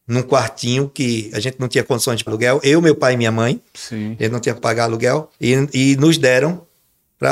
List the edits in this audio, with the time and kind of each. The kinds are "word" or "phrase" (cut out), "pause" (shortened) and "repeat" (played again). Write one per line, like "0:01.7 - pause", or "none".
0:02.3 - word
0:03.7 - pause
0:04.6 - word
0:05.3 - pause